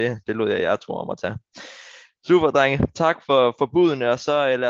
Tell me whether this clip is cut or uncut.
uncut